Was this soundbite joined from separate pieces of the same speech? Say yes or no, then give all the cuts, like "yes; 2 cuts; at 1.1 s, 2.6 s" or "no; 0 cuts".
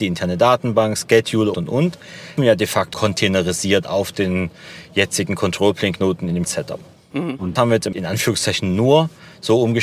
yes; 6 cuts; at 1.5 s, 2.4 s, 2.9 s, 6.4 s, 7.6 s, 7.9 s